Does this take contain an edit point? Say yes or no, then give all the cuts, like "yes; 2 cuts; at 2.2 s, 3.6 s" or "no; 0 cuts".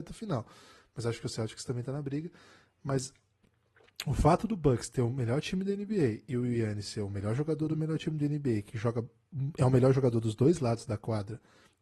no; 0 cuts